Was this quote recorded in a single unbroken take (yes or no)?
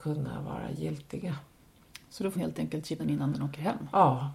no